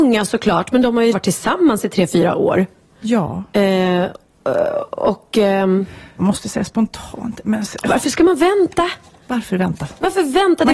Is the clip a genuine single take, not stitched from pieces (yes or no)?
no